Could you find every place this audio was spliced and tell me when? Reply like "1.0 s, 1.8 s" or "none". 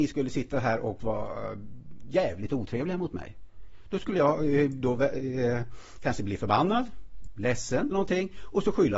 7.9 s